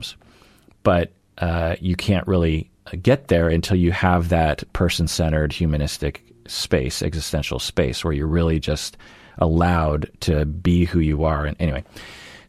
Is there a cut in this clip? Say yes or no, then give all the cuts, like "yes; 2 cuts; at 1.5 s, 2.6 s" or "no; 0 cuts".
no; 0 cuts